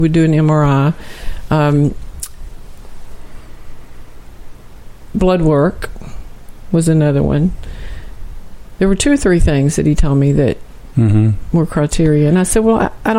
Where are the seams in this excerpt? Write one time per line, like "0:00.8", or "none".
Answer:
none